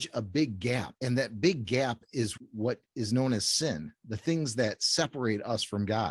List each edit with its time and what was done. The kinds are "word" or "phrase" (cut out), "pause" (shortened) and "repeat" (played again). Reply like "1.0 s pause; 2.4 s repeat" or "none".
none